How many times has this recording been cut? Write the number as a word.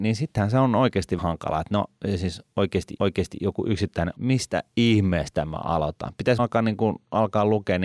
four